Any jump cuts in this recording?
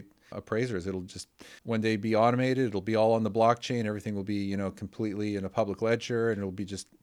yes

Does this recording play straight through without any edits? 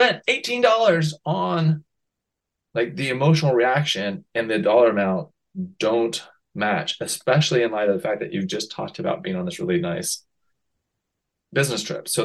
yes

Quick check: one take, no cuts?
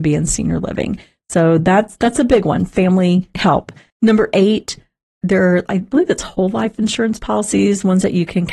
yes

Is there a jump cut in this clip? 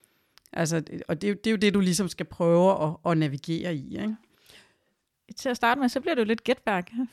no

